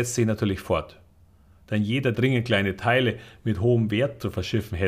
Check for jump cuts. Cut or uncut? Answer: cut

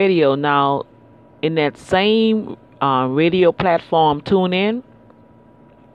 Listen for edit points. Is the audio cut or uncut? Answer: uncut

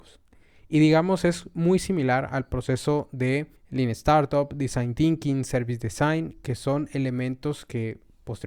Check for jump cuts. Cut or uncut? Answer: cut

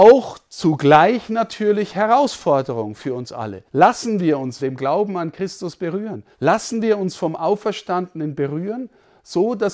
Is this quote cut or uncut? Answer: cut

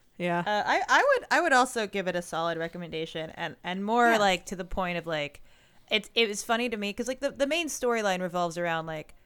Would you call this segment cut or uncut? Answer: uncut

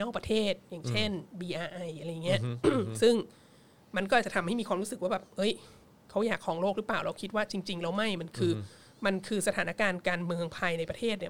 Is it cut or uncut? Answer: uncut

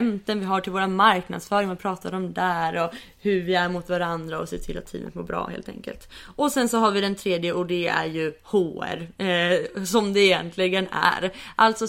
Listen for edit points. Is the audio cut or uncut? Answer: uncut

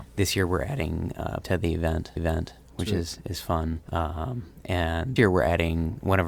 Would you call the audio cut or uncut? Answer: cut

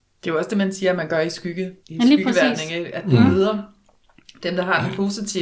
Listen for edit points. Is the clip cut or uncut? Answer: cut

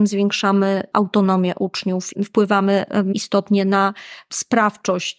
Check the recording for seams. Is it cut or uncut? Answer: cut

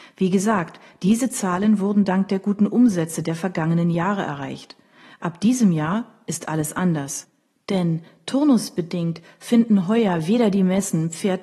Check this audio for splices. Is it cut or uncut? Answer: uncut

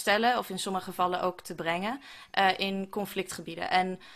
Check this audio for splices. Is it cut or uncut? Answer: uncut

